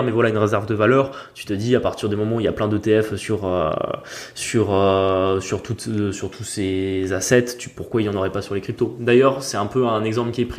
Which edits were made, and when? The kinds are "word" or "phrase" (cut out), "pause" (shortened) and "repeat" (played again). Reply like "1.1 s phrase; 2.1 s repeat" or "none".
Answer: none